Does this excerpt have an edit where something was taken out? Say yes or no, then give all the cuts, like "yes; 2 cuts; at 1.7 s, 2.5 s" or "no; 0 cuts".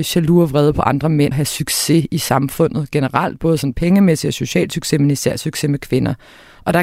yes; 1 cut; at 1.3 s